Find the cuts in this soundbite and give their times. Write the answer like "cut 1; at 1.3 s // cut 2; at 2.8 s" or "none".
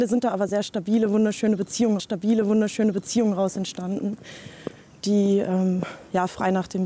cut 1; at 2.0 s